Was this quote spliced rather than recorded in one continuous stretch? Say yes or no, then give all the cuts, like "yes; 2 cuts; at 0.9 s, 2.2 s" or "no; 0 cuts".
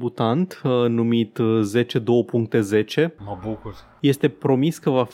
no; 0 cuts